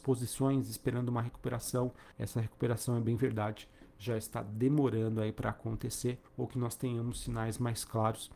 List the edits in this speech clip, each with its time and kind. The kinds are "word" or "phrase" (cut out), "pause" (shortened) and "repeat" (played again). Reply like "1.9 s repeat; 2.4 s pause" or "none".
2.1 s pause; 6.3 s pause